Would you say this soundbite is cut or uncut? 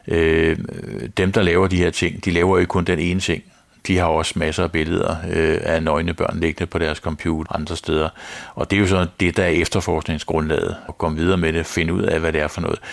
cut